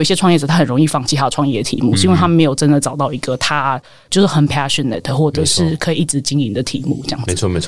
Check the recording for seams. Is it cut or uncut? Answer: uncut